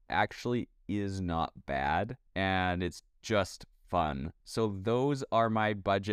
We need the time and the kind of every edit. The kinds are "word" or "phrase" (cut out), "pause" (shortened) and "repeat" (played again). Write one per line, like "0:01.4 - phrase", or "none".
0:02.3 - pause
0:04.4 - pause